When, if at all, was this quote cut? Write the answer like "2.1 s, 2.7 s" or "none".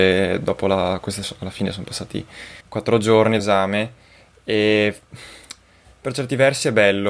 1.2 s, 2.6 s, 3.4 s